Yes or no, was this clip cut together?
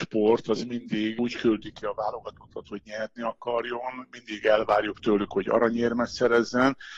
no